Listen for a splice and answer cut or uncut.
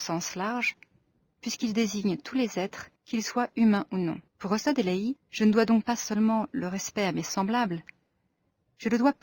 cut